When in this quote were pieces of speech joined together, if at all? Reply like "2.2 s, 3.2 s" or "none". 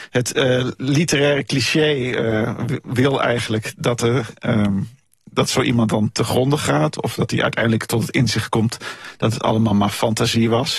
none